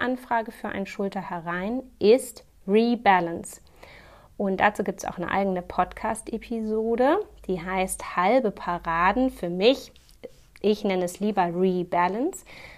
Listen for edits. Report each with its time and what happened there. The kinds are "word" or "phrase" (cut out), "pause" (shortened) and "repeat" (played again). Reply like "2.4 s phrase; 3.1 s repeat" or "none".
none